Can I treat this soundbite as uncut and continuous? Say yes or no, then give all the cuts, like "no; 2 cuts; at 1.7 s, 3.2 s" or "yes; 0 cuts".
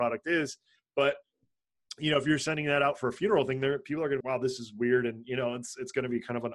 no; 1 cut; at 4.2 s